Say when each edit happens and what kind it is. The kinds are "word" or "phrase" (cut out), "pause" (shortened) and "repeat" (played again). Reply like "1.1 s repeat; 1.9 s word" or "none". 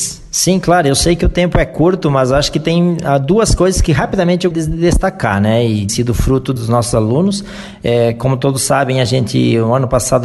4.5 s word; 5.9 s word; 6.6 s word